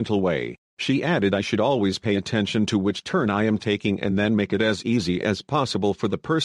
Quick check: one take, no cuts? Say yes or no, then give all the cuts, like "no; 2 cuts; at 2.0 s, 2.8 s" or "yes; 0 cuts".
yes; 0 cuts